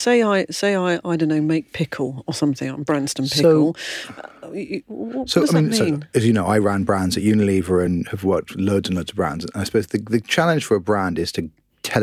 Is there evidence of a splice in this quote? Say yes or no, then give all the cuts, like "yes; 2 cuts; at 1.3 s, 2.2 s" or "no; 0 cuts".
no; 0 cuts